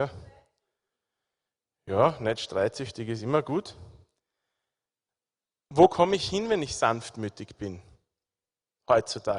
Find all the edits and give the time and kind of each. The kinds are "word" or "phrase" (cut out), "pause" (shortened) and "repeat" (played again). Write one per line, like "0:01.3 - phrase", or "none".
none